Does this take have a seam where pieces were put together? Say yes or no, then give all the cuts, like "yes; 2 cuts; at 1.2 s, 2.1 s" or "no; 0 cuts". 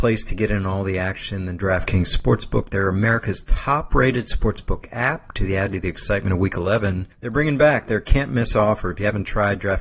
yes; 1 cut; at 7.1 s